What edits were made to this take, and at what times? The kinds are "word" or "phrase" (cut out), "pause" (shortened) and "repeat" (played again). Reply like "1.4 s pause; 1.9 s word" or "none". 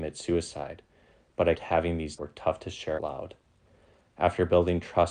1.5 s word; 2.2 s phrase; 3.0 s word